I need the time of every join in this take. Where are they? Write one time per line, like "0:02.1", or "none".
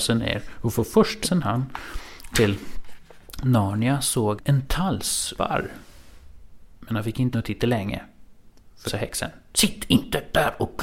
0:01.2
0:02.3
0:04.4
0:05.4
0:07.3
0:08.9

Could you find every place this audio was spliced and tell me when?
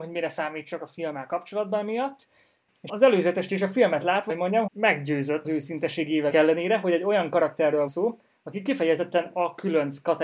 0:02.9
0:04.3
0:04.7
0:05.4
0:06.3
0:07.9

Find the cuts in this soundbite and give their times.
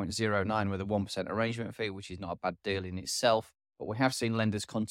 none

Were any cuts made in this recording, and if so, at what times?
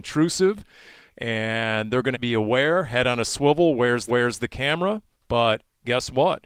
0:02.1
0:04.1
0:05.1

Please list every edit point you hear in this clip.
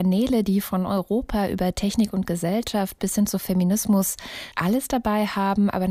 0:04.5

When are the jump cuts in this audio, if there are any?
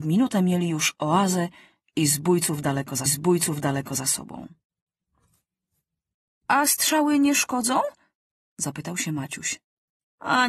0:03.1

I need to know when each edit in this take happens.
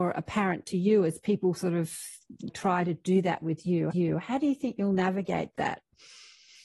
0:02.5
0:03.9

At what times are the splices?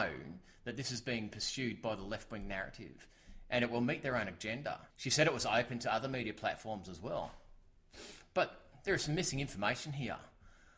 0:04.9

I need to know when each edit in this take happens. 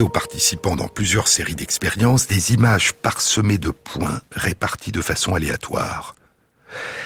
none

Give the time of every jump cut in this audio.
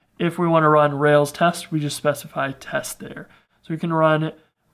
none

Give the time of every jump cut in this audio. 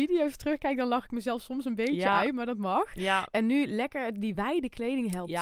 none

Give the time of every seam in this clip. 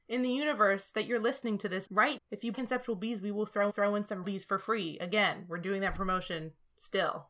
0:01.9
0:02.2
0:02.5
0:03.7
0:04.2

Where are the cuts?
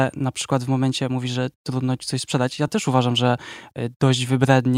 none

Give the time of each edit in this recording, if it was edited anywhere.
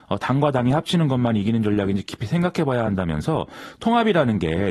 none

